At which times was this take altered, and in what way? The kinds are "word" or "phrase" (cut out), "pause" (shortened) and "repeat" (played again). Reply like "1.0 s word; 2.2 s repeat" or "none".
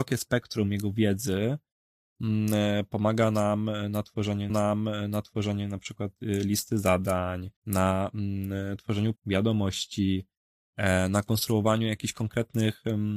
4.5 s repeat; 7.6 s pause; 9.2 s word